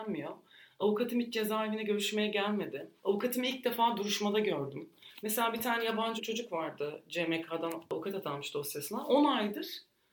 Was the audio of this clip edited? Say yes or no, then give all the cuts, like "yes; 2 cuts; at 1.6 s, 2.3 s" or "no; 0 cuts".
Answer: yes; 2 cuts; at 3.0 s, 6.2 s